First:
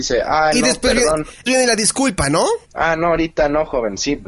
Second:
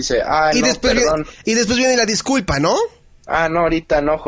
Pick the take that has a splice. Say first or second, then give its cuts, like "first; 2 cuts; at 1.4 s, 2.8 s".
first; 2 cuts; at 1.5 s, 2.6 s